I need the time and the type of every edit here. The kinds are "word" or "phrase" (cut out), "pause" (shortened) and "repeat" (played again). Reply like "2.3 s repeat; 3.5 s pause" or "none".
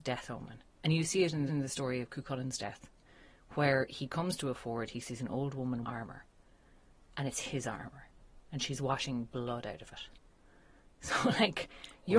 1.5 s repeat; 5.8 s word